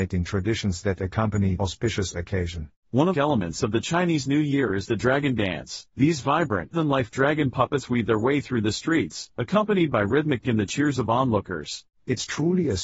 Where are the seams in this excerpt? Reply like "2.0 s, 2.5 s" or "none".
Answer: 1.6 s, 3.1 s, 5.9 s, 6.7 s, 10.4 s